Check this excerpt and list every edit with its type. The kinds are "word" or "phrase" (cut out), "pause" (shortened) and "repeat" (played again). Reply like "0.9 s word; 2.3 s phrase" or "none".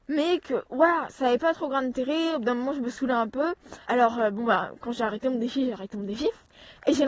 3.8 s pause